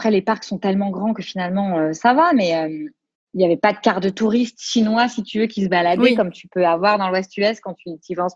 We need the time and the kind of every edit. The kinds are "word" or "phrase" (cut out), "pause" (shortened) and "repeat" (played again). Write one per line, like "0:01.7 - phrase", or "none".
none